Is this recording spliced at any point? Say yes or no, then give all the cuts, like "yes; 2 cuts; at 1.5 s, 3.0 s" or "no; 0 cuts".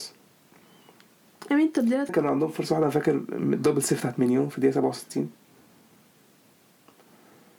yes; 1 cut; at 2.1 s